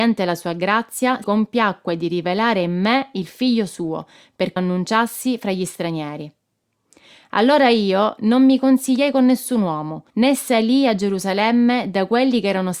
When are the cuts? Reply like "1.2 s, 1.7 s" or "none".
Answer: 1.2 s, 4.6 s, 10.1 s